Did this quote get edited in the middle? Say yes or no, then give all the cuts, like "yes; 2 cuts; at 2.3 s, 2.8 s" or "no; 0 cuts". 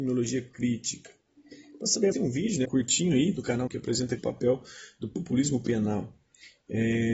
yes; 4 cuts; at 2.1 s, 2.6 s, 3.7 s, 4.2 s